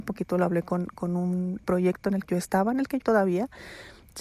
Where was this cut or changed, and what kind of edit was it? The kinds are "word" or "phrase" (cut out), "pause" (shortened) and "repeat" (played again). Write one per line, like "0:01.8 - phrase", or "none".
0:01.6 - word
0:02.3 - word
0:03.0 - word

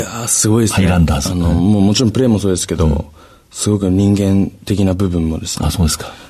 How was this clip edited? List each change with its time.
none

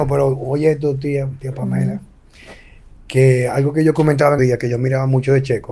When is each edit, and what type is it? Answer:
0:04.4 - word

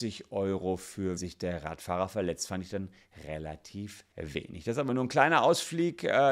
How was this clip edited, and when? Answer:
0:01.2 - word
0:04.1 - pause

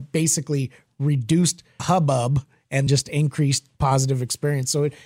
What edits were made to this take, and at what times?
0:01.8 - word
0:02.9 - word

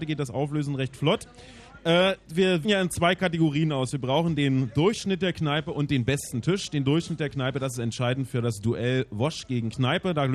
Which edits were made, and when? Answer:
0:02.6 - word

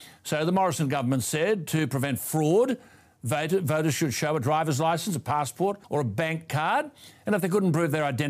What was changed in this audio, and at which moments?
0:05.8 - pause

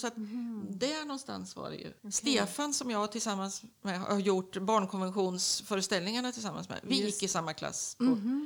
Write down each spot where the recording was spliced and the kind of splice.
0:02.0 - pause
0:03.7 - pause

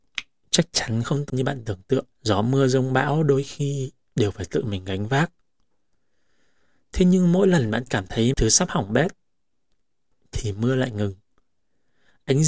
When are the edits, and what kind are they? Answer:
0:01.3 - word
0:02.1 - pause
0:08.3 - word

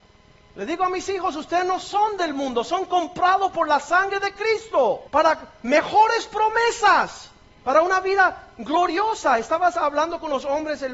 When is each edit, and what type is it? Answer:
0:05.1 - pause
0:07.5 - pause

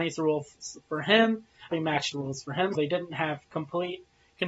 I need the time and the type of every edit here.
0:01.7 - word
0:02.1 - phrase
0:02.7 - word

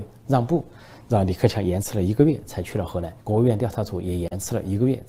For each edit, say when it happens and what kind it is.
0:03.2 - pause

